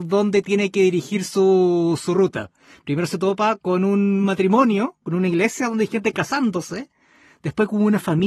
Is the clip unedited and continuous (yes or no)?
yes